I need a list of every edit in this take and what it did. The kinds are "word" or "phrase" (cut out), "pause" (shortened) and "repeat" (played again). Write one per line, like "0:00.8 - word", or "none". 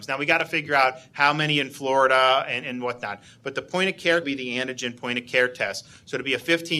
0:02.6 - word
0:04.2 - phrase